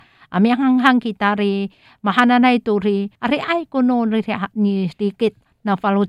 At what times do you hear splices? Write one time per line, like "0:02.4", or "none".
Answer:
0:03.1